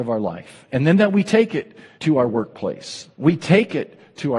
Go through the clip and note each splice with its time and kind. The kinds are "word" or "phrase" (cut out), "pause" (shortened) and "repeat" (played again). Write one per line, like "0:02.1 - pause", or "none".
0:01.9 - pause
0:03.1 - pause